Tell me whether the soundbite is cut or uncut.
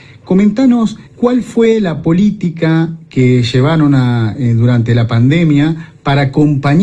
cut